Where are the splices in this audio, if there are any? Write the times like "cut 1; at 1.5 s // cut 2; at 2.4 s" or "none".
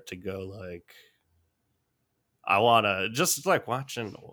none